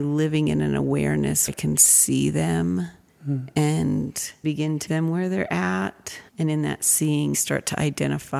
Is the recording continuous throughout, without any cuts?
no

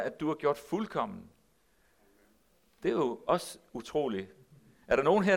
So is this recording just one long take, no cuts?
yes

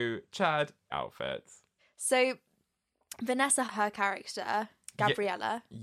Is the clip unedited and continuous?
no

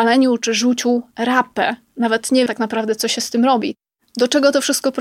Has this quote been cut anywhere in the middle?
yes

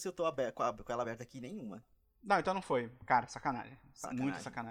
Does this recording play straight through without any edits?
yes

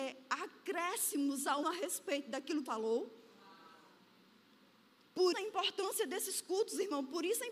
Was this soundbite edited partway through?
yes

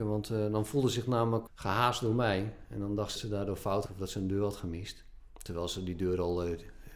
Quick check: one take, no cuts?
no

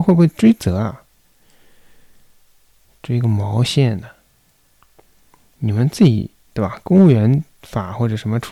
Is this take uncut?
yes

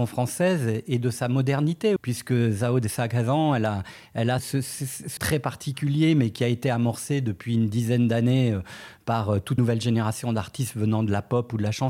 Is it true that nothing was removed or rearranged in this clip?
no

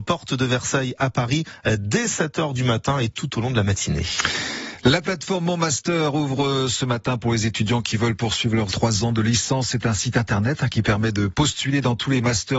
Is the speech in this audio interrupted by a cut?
yes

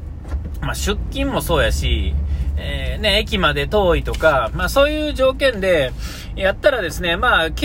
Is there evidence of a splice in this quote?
no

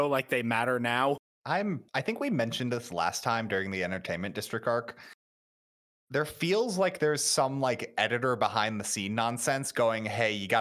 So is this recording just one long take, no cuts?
no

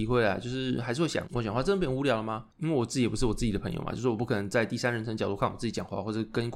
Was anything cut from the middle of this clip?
yes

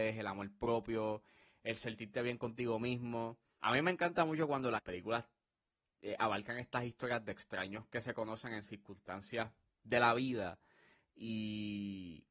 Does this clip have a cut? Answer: no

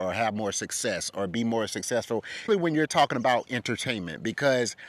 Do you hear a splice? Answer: yes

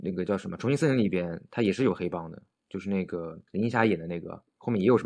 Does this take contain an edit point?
yes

